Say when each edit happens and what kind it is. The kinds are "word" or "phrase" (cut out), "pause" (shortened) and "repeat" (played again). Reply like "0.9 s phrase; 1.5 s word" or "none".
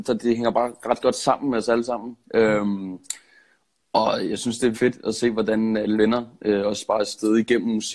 2.2 s pause; 4.7 s word; 6.0 s word